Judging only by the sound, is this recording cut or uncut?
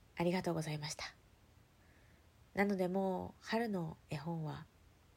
uncut